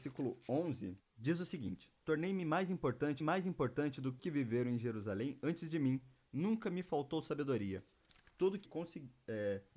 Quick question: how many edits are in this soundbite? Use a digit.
4